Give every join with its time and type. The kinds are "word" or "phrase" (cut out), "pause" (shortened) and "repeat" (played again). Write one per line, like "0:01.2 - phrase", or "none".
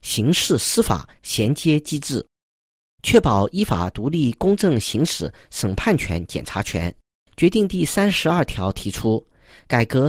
none